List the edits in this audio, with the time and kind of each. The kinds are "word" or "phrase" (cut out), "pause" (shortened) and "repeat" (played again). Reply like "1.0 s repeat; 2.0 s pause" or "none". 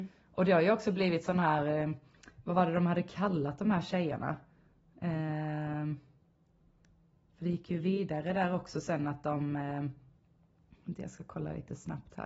none